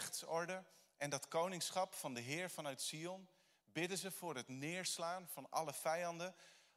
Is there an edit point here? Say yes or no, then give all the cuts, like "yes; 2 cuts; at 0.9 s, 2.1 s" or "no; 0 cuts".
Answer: no; 0 cuts